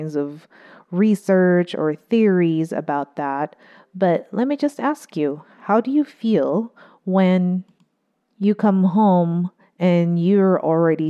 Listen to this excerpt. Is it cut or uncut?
uncut